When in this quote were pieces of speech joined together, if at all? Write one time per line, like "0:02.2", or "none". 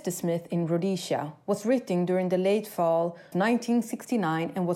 0:03.3